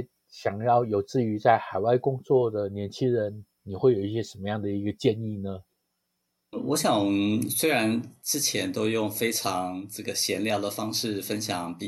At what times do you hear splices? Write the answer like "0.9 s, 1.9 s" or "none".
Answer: 6.5 s